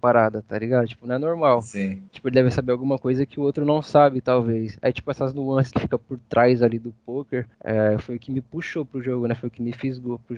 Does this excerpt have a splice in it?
yes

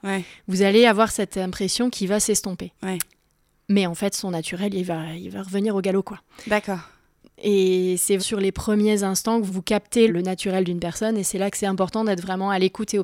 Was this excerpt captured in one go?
no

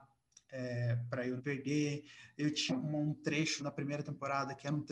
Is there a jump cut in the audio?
yes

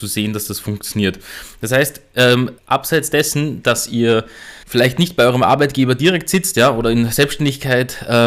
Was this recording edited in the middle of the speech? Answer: yes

